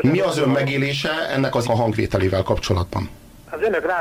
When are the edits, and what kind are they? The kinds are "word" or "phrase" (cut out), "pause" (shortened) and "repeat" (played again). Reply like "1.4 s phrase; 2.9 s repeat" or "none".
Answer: 1.6 s word